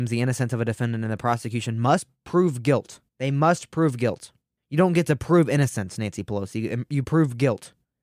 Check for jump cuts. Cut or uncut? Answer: cut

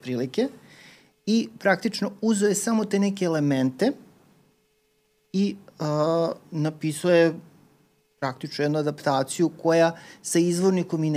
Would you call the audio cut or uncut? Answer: uncut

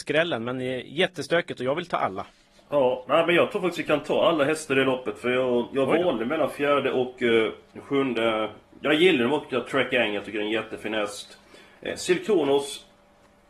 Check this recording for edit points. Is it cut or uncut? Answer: uncut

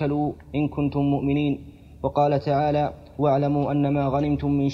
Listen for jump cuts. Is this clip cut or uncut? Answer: uncut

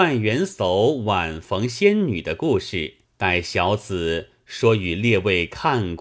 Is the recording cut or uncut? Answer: cut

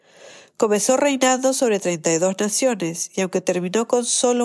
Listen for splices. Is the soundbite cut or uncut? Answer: uncut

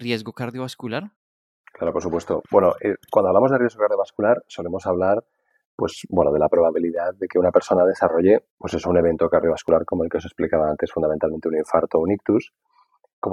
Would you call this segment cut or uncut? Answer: cut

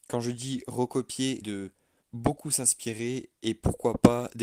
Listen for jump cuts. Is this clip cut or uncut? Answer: cut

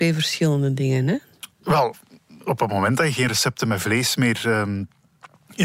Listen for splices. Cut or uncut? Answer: uncut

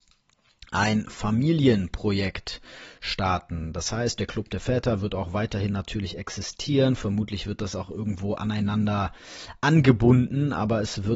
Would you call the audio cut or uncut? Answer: uncut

